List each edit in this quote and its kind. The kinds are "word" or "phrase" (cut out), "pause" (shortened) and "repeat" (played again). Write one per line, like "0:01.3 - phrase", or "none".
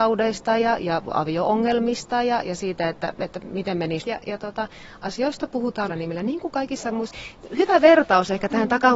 0:04.0 - word
0:05.9 - word

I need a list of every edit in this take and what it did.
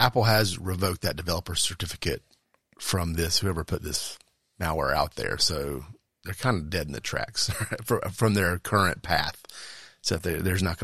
none

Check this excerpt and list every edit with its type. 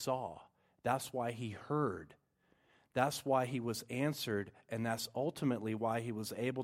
none

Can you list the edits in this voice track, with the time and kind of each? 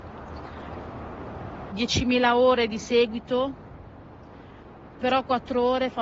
0:01.7 - phrase

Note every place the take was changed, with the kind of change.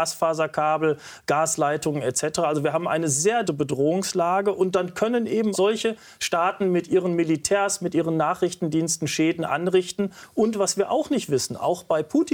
0:03.4 - word
0:05.5 - word

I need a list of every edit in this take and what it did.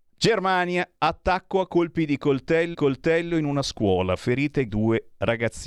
0:02.7 - repeat
0:04.7 - word

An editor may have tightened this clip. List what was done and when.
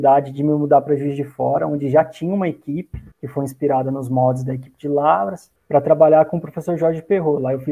0:03.1 - pause
0:05.6 - pause

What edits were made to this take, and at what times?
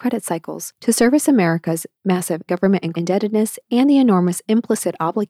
0:02.5 - word
0:02.9 - word

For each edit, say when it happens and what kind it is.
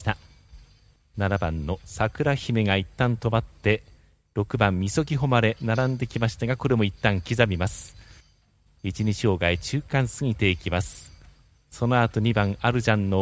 none

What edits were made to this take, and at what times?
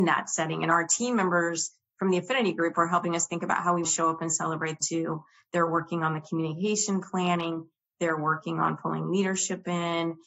0:03.8 - word
0:04.8 - word

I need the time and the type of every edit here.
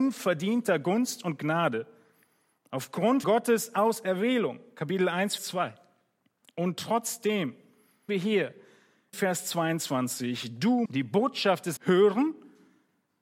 0:03.2 - word
0:05.4 - word
0:08.1 - word
0:09.1 - word
0:10.8 - word
0:11.8 - word

